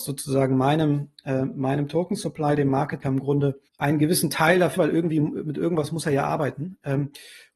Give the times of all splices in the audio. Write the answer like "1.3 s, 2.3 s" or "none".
3.0 s, 3.7 s, 4.8 s